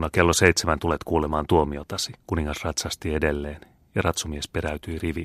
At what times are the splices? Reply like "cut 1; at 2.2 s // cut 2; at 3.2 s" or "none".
cut 1; at 2.2 s